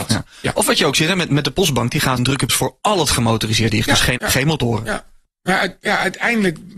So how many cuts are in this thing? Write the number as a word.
four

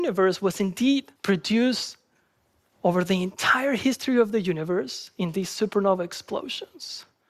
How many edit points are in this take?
one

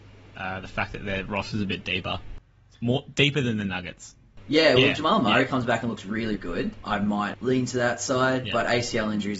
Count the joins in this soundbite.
two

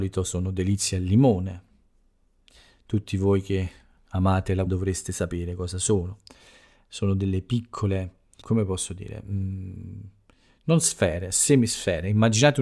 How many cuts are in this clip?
two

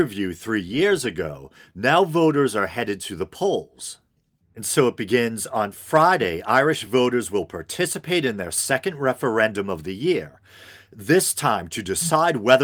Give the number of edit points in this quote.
zero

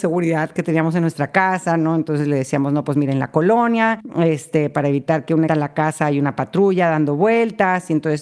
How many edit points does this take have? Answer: one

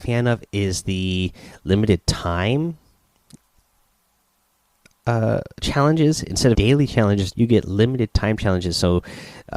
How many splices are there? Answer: two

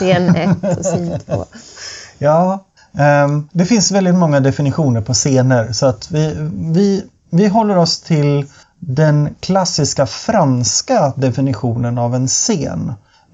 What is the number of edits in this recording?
one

